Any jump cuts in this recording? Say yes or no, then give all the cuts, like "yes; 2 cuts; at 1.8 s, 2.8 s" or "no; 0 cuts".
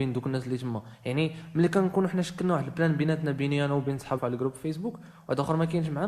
yes; 1 cut; at 4.2 s